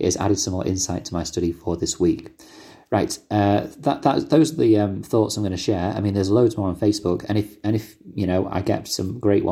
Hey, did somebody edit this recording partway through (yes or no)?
no